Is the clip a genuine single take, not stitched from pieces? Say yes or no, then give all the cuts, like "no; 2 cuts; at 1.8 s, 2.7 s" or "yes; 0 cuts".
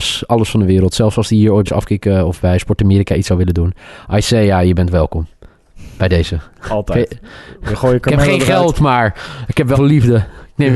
no; 2 cuts; at 1.7 s, 9.7 s